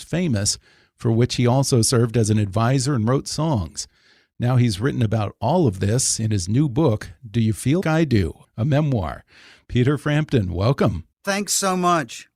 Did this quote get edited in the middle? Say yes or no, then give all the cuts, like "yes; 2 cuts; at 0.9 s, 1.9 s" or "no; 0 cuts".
yes; 2 cuts; at 7.8 s, 11.1 s